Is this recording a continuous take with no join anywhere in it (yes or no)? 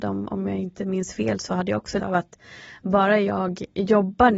no